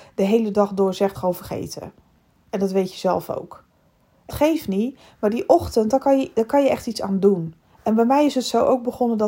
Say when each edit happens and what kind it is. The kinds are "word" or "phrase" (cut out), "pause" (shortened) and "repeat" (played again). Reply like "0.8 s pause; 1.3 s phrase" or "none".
1.1 s phrase; 4.3 s word; 7.6 s pause